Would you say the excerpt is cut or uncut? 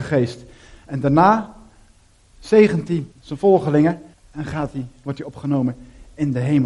cut